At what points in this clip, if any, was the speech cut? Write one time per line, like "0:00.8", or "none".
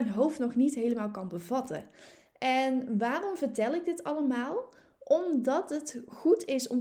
none